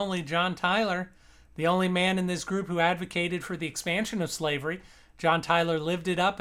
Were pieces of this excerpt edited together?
no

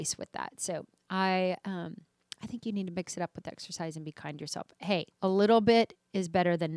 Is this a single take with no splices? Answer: no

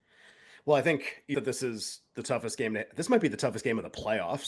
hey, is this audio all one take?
no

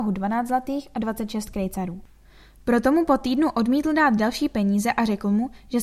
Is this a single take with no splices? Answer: yes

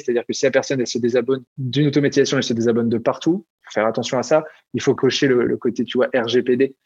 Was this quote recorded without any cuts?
no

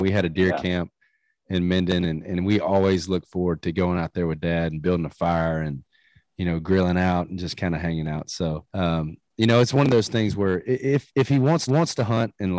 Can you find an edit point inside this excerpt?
yes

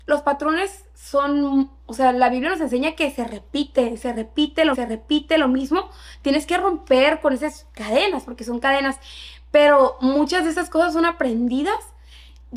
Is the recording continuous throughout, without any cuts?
no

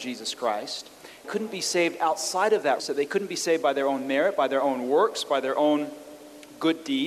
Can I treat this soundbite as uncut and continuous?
no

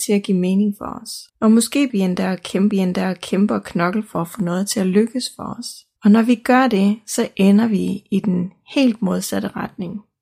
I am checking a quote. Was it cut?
yes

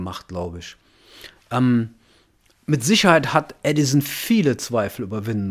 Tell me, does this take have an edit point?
no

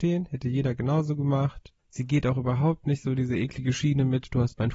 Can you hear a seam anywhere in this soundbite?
yes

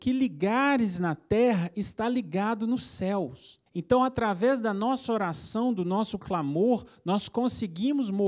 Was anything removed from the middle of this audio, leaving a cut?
yes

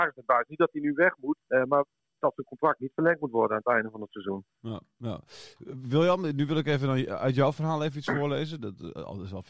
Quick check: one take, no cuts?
no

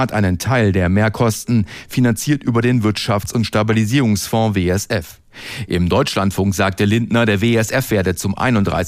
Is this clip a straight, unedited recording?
yes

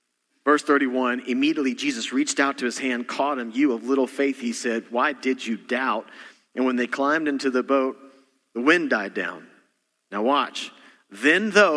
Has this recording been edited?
no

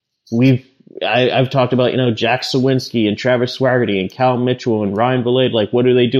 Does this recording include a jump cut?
no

